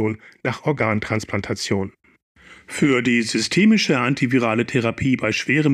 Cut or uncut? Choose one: uncut